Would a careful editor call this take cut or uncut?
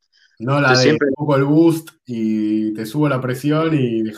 cut